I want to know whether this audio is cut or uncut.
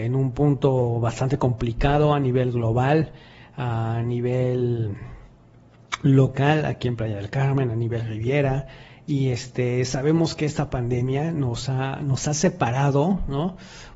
uncut